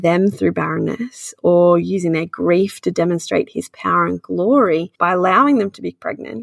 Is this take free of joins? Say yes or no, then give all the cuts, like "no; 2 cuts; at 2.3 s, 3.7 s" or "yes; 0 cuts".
no; 1 cut; at 4.9 s